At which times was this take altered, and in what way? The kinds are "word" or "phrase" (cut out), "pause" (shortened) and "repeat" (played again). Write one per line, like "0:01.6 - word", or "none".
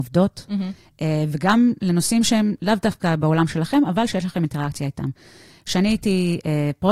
none